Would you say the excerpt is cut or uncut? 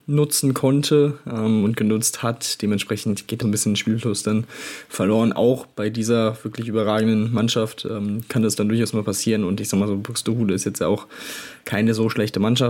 cut